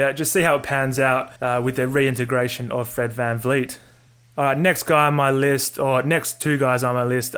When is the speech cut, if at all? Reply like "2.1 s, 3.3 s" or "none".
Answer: 1.4 s, 4.1 s